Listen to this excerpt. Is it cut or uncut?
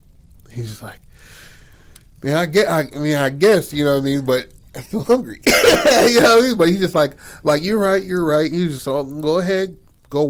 cut